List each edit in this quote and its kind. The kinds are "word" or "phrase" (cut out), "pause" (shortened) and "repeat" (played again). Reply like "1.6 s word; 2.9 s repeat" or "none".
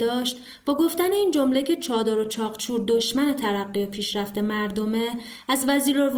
none